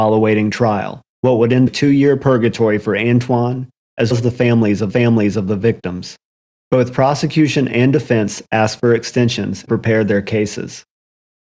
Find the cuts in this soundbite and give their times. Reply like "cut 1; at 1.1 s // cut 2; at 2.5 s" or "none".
cut 1; at 1.1 s // cut 2; at 1.7 s // cut 3; at 4.1 s // cut 4; at 4.9 s // cut 5; at 6.4 s // cut 6; at 9.7 s